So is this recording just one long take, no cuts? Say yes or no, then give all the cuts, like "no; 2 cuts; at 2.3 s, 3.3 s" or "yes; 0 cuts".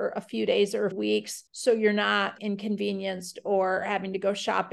no; 3 cuts; at 0.9 s, 1.5 s, 2.4 s